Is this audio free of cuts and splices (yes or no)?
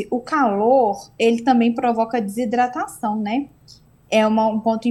yes